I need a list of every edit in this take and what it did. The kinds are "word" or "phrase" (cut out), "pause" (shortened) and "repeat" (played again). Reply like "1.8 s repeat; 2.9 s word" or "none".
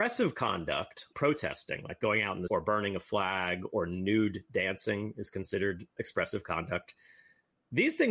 1.1 s word; 2.5 s word; 6.0 s word